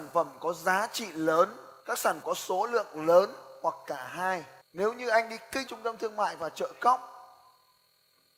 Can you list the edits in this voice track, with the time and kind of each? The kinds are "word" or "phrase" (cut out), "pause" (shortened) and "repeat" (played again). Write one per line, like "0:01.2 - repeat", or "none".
0:01.8 - pause
0:02.2 - word
0:04.6 - pause
0:05.7 - word